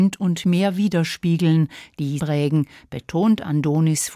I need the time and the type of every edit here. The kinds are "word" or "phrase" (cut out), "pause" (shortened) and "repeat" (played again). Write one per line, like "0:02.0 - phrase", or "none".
0:02.2 - phrase